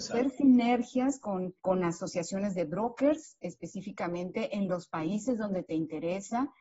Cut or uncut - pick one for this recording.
cut